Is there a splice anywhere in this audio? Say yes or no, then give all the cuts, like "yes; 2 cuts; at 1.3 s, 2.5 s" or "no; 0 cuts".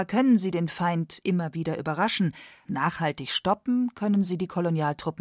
yes; 1 cut; at 2.6 s